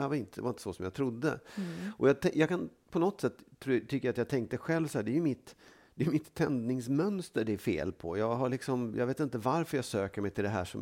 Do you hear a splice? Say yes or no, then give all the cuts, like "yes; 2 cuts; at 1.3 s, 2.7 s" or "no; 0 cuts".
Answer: no; 0 cuts